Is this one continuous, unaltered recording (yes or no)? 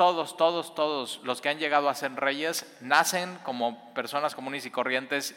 yes